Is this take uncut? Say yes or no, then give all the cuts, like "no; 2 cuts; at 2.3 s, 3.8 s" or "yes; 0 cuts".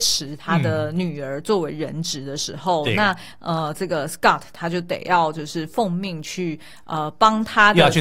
yes; 0 cuts